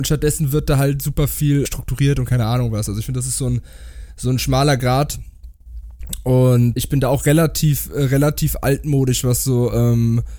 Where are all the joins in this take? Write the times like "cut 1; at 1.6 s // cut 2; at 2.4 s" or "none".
cut 1; at 1.7 s // cut 2; at 6.8 s